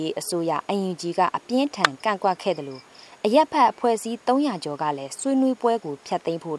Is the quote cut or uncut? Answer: uncut